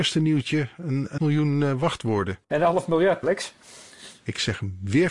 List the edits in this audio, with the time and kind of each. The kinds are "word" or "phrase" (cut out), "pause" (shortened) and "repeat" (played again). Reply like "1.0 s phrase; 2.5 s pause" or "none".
1.2 s word; 2.4 s pause; 3.2 s word